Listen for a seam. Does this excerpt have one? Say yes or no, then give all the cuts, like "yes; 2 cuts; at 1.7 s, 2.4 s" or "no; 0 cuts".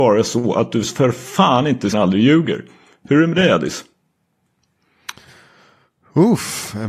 yes; 1 cut; at 1.9 s